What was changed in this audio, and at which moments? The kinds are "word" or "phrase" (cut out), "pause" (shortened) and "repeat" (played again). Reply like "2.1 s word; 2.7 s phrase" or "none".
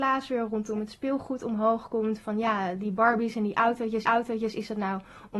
4.0 s repeat